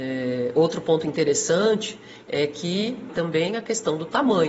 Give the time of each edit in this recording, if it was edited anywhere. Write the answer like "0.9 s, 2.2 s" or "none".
3.1 s